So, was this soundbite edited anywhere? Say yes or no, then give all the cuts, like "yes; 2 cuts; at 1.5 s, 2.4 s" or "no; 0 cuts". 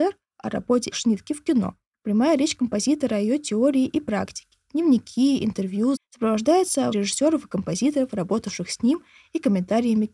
yes; 3 cuts; at 0.9 s, 6.0 s, 6.9 s